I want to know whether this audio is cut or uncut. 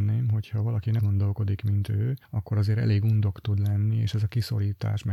cut